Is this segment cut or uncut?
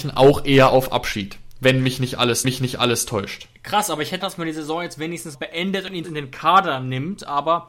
cut